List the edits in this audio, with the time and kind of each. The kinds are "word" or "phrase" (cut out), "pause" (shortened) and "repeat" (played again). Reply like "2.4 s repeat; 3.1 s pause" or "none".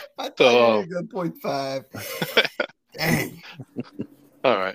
1.3 s word